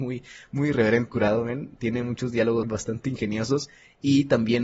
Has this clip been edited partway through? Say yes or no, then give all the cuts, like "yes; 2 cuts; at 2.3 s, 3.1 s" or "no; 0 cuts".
yes; 2 cuts; at 1.1 s, 2.6 s